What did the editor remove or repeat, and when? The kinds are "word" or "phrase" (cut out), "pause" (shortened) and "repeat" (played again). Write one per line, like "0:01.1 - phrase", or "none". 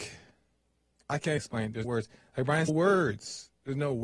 0:01.4 - word
0:01.8 - word
0:02.7 - phrase